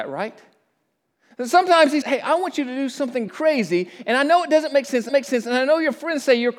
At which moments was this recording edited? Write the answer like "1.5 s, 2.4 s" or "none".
2.0 s, 3.3 s, 5.1 s